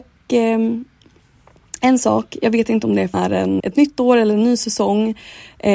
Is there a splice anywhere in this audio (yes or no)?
yes